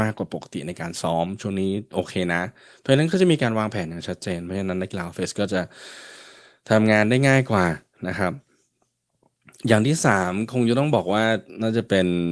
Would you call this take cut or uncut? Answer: uncut